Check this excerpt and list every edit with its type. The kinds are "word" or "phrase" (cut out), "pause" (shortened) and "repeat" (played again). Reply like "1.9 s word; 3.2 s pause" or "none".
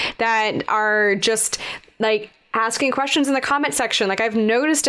none